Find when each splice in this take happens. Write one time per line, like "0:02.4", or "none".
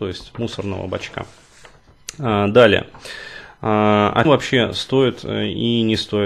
0:04.2

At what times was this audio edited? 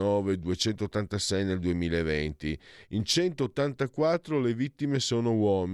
none

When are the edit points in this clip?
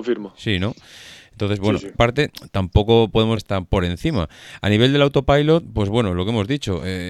0:01.9
0:03.4

